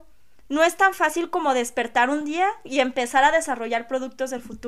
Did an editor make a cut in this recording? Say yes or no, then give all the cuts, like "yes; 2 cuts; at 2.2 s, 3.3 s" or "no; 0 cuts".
no; 0 cuts